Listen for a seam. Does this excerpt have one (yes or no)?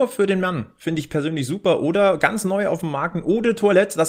no